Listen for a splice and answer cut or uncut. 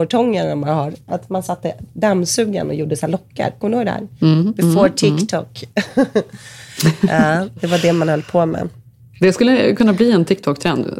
uncut